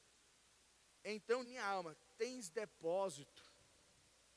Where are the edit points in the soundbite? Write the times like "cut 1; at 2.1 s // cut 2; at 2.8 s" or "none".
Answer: cut 1; at 1.4 s